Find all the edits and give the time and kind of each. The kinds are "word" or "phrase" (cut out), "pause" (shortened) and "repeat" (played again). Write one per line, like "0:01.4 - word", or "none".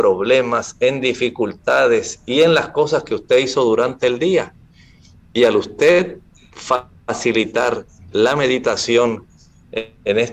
none